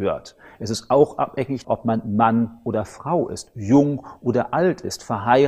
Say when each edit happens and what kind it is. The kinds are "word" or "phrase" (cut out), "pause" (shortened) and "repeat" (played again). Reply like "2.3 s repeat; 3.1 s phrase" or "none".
1.6 s word